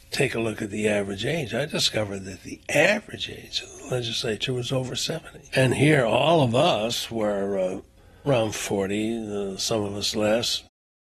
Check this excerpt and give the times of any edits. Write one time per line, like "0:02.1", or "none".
0:05.5
0:08.3